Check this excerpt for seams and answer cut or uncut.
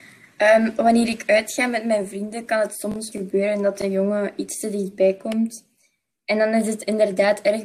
cut